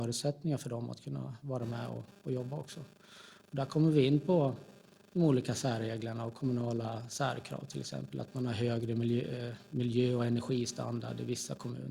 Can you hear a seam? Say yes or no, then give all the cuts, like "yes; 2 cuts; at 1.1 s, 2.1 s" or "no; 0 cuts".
no; 0 cuts